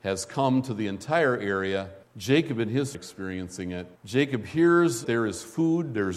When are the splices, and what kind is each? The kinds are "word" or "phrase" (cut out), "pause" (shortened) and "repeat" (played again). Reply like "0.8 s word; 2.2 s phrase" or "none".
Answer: 2.0 s pause; 2.9 s phrase; 4.0 s pause; 5.0 s word

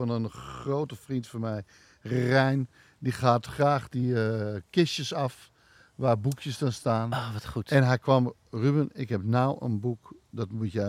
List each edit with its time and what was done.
none

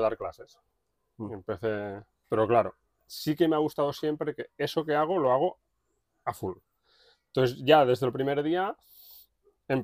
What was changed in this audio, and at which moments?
none

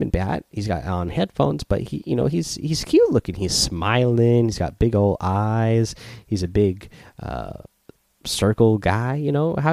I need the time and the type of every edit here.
none

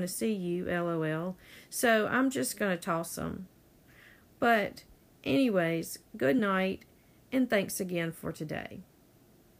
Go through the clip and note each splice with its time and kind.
none

